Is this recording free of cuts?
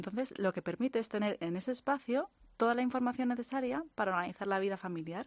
yes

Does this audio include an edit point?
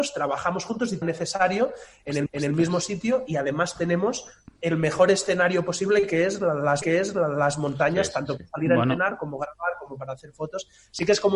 yes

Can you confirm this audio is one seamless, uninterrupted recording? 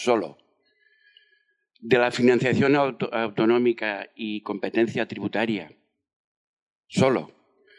yes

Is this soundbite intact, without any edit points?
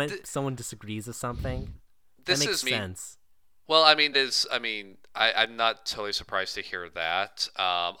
no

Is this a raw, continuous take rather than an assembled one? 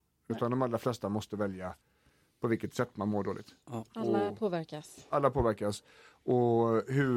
yes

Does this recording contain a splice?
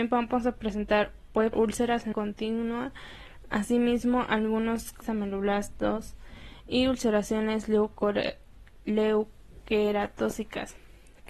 yes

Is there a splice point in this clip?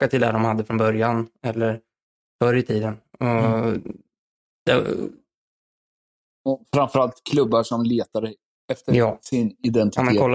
no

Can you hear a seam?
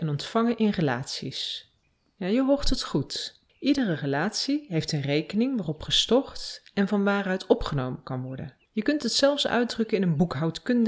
yes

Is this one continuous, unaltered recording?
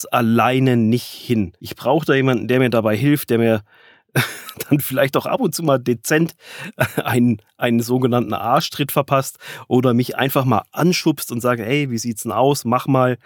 no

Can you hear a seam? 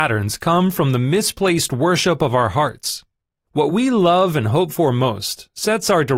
no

